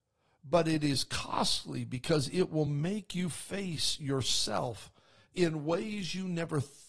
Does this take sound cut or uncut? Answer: uncut